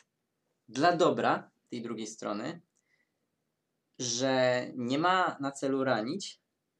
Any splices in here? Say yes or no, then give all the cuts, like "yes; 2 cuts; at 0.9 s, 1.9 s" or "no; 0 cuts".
no; 0 cuts